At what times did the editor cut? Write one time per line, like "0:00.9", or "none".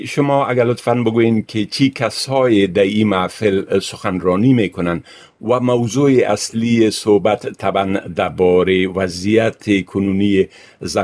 none